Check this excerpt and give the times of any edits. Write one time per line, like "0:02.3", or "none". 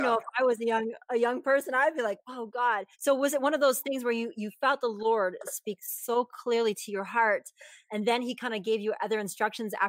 0:02.9

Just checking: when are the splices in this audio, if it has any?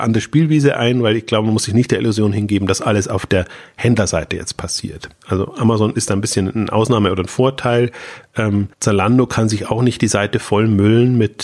0:08.7

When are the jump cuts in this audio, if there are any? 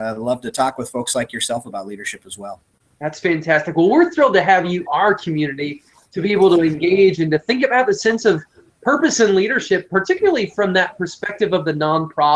0:04.9

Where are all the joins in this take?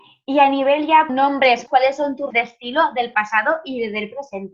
0:01.1
0:01.7
0:02.3

